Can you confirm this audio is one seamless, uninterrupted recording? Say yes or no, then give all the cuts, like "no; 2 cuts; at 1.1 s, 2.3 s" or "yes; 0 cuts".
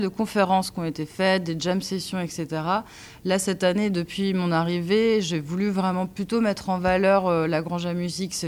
yes; 0 cuts